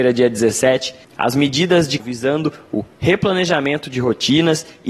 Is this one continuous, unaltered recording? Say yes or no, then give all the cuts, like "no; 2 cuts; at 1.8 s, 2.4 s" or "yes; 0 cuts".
no; 1 cut; at 2.0 s